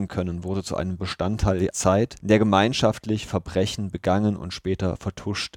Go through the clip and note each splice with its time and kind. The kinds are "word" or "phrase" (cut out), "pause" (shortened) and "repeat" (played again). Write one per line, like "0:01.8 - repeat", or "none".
0:01.0 - word
0:01.7 - word